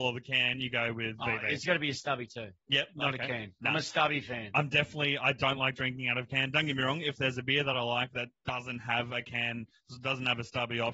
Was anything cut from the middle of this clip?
no; 0 cuts

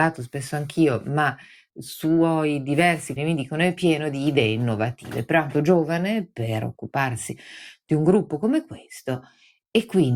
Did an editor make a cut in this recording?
yes; 2 cuts; at 3.2 s, 5.5 s

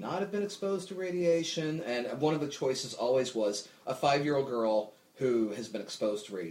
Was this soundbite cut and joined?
no; 0 cuts

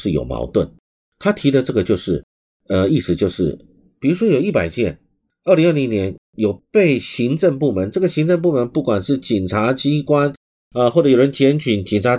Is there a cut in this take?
no; 0 cuts

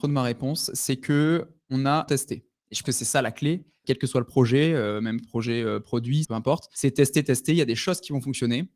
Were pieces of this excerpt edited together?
yes; 4 cuts; at 2.1 s, 2.8 s, 3.8 s, 6.2 s

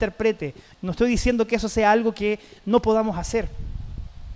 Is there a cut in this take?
no; 0 cuts

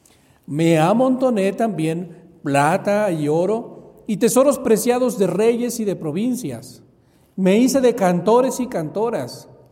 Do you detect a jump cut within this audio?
no; 0 cuts

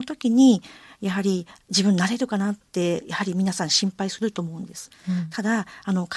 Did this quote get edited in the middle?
no; 0 cuts

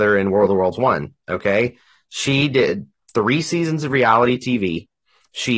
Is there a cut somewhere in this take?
no; 0 cuts

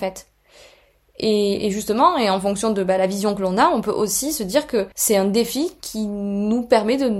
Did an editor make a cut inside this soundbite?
yes; 1 cut; at 4.9 s

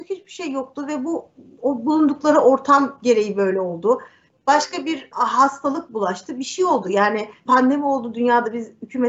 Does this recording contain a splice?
yes; 2 cuts; at 5.1 s, 7.5 s

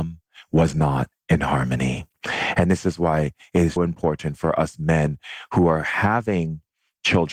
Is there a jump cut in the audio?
yes; 1 cut; at 3.8 s

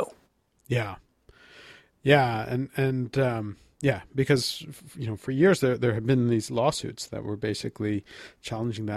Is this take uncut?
yes; 0 cuts

